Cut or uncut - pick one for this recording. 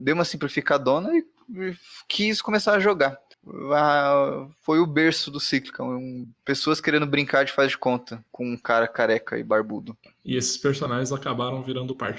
cut